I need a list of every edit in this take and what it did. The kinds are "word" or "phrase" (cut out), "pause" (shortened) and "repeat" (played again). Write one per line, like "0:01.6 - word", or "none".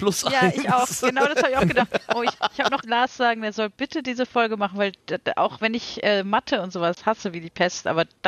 0:02.8 - phrase